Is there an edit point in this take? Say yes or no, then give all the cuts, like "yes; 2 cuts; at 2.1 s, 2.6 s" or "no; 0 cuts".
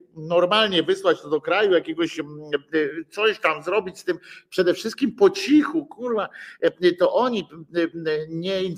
no; 0 cuts